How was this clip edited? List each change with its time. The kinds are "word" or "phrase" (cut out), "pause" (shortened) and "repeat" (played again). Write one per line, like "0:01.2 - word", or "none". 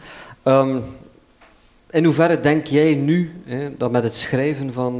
none